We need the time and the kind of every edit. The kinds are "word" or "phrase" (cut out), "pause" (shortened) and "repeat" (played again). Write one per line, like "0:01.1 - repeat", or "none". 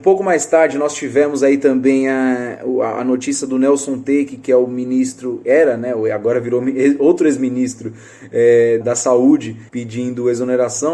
0:08.8 - word
0:09.7 - pause